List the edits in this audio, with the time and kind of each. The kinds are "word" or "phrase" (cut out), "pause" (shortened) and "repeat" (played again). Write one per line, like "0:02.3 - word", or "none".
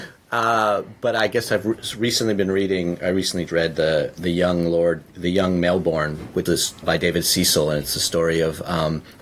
0:03.5 - word
0:04.2 - word
0:05.1 - word
0:06.5 - word
0:06.8 - word

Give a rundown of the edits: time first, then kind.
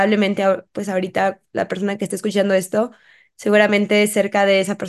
none

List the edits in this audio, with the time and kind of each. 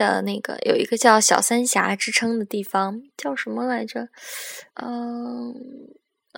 0:04.7 - pause

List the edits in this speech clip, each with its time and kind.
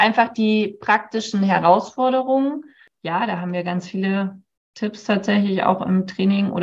none

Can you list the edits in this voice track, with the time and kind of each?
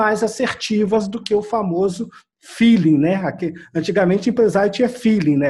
none

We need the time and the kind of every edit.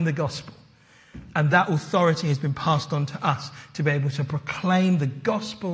none

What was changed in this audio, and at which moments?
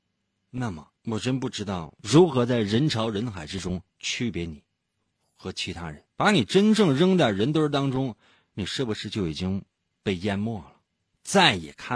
0:01.0 - pause
0:02.0 - pause
0:03.9 - pause
0:06.1 - pause

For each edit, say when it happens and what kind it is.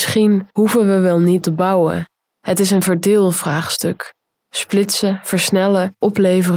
0:01.4 - word

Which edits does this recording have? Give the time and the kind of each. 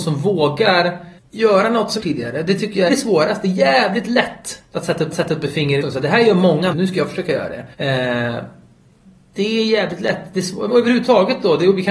0:01.2 - pause
0:02.0 - phrase
0:02.9 - phrase
0:05.1 - repeat
0:05.8 - word
0:06.7 - word
0:07.7 - pause
0:10.7 - word

